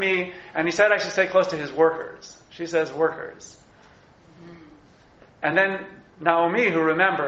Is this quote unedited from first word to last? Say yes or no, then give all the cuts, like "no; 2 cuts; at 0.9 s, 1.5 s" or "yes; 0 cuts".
yes; 0 cuts